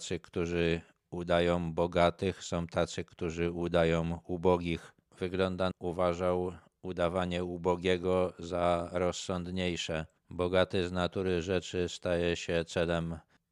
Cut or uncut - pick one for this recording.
cut